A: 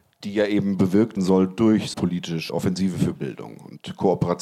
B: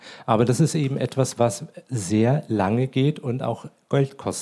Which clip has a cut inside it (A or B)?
A